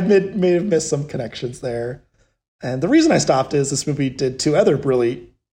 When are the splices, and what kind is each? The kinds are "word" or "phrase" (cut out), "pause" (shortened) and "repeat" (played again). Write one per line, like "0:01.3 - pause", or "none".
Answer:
none